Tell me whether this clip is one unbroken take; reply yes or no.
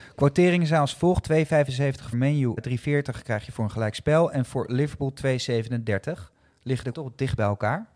no